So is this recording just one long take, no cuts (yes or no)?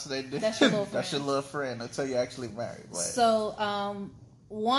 yes